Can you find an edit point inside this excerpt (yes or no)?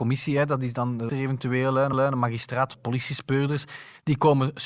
yes